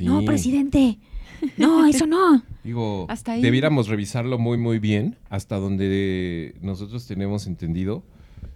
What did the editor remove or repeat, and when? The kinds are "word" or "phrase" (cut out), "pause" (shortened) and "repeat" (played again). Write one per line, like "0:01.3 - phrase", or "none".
none